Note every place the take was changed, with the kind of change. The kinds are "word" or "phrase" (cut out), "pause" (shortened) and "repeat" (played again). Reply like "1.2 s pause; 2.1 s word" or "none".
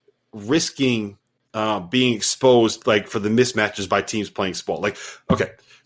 none